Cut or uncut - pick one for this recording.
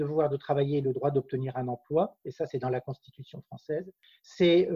uncut